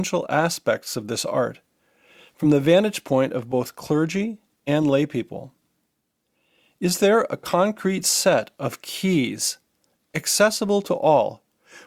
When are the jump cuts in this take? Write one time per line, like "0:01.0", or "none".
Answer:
none